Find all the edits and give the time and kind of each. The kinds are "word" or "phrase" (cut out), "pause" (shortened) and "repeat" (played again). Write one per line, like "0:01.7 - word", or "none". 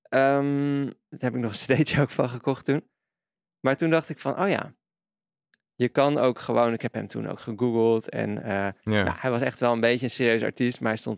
none